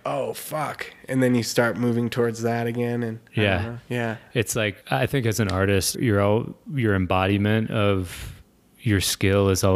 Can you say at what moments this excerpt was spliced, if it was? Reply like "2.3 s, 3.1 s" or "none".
4.8 s, 5.9 s